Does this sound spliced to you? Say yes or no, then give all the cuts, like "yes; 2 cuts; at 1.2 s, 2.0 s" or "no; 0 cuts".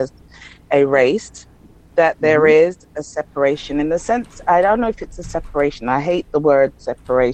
no; 0 cuts